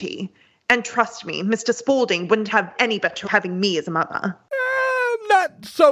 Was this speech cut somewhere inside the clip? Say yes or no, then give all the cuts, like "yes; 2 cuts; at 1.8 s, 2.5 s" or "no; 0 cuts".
yes; 2 cuts; at 2.7 s, 3.2 s